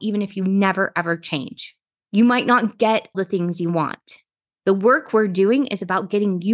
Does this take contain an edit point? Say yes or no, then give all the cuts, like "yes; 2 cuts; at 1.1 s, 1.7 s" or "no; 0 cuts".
yes; 1 cut; at 3.1 s